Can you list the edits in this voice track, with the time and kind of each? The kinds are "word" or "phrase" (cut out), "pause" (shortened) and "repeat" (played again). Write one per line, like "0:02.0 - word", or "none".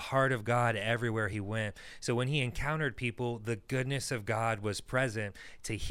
none